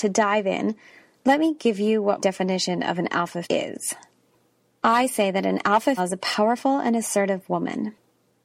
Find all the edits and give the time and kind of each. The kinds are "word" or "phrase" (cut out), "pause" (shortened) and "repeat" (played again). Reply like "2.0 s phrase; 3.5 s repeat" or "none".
2.2 s word; 3.4 s word; 6.0 s word